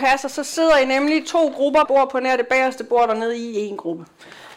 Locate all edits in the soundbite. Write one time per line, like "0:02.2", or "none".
0:01.8

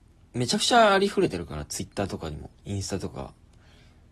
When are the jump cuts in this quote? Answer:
0:02.6

